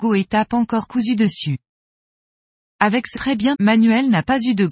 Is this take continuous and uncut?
no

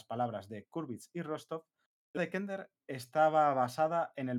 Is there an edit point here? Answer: yes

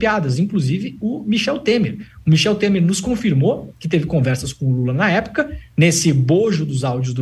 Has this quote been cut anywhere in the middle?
no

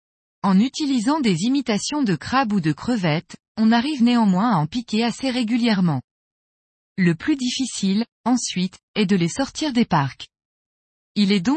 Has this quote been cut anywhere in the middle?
no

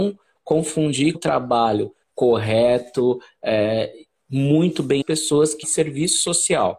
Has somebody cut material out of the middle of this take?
yes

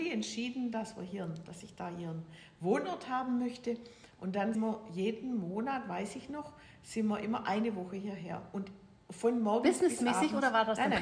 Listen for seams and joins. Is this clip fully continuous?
no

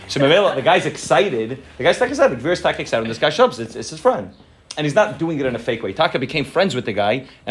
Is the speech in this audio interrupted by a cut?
no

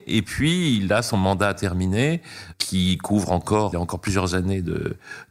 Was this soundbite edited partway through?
yes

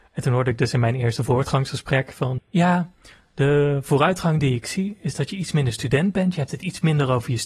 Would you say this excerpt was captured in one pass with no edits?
no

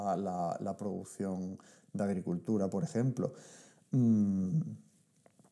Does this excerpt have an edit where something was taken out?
no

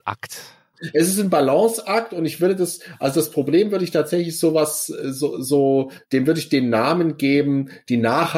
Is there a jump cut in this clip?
yes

